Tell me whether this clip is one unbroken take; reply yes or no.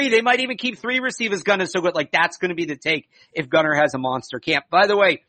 yes